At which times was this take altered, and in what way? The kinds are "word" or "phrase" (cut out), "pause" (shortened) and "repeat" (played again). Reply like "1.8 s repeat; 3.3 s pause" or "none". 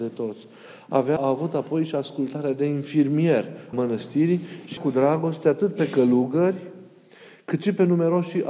1.2 s word; 3.7 s word; 4.8 s word